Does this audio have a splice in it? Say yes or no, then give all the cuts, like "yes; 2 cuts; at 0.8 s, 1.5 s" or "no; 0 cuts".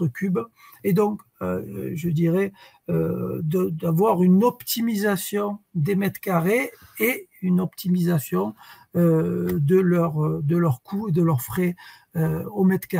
no; 0 cuts